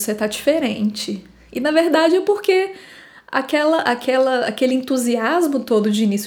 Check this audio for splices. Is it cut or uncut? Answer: uncut